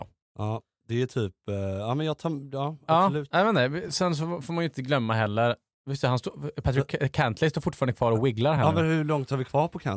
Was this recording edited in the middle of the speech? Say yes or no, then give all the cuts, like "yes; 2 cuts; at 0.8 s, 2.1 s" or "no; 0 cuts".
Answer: no; 0 cuts